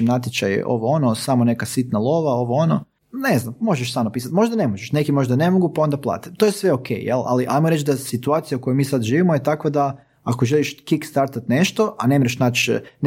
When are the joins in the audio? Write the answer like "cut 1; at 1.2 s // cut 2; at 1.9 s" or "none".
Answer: none